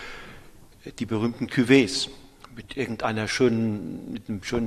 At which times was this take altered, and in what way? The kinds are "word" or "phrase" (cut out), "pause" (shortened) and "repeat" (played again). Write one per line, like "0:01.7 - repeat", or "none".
none

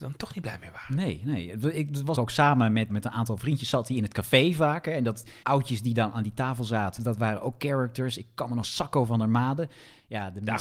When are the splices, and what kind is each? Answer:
0:02.1 - phrase
0:02.9 - word
0:05.4 - word
0:07.0 - word
0:08.6 - word

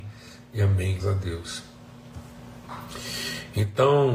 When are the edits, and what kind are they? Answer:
0:01.0 - word

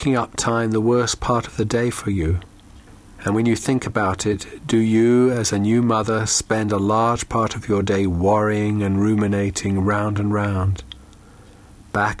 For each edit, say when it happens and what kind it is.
none

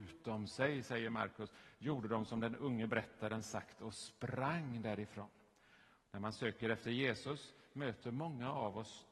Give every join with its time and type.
none

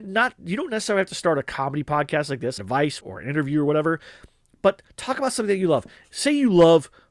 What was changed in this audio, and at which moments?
0:02.6 - word
0:03.0 - word

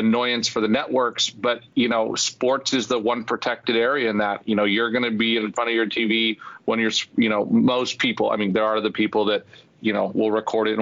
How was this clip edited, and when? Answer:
none

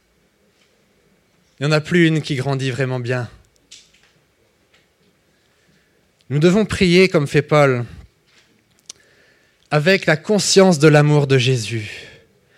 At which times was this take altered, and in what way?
none

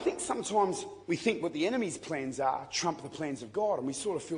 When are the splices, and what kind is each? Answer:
0:01.0 - pause

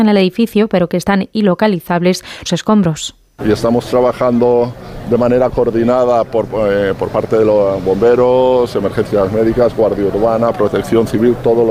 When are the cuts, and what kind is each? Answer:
0:02.5 - phrase

